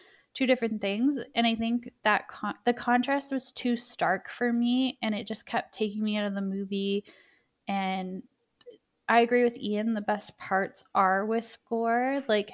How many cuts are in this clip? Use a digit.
1